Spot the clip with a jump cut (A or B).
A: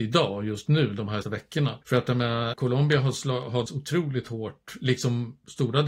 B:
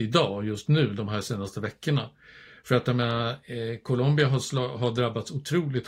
A